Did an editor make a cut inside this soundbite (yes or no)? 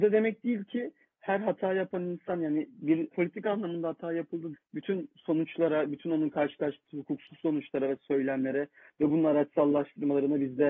yes